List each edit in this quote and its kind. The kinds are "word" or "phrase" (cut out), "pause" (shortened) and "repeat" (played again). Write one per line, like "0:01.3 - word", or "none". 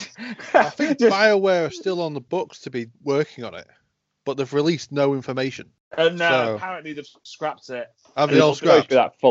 none